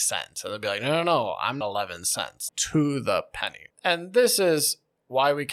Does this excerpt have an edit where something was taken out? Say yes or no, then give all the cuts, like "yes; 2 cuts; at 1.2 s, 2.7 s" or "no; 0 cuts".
yes; 2 cuts; at 1.6 s, 2.5 s